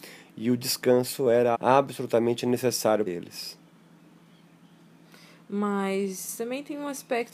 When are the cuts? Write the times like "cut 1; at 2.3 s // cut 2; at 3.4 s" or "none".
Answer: cut 1; at 1.5 s // cut 2; at 3.1 s